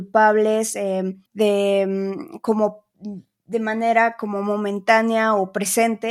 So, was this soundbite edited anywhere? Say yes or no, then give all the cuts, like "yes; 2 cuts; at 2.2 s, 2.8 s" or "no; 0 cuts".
yes; 1 cut; at 1.3 s